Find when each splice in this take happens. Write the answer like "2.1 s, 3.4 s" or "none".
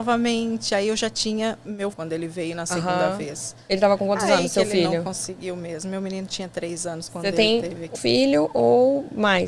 1.9 s, 7.9 s